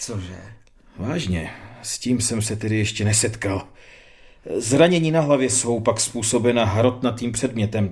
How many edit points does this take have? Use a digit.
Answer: 0